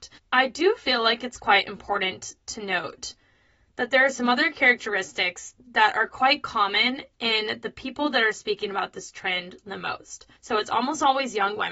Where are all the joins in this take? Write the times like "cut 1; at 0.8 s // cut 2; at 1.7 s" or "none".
cut 1; at 10.4 s